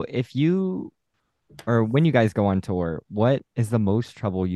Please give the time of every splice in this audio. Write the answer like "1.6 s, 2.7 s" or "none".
3.5 s